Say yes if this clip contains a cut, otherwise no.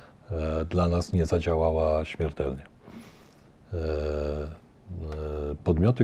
no